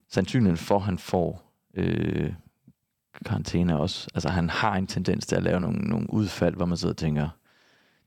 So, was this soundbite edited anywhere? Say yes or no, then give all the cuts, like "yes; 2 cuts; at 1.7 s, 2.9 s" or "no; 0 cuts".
no; 0 cuts